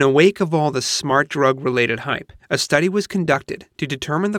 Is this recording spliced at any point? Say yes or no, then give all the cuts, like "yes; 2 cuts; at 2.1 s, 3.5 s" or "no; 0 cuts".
yes; 1 cut; at 2.4 s